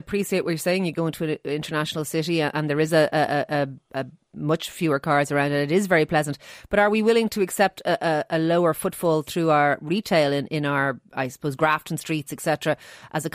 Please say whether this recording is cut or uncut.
uncut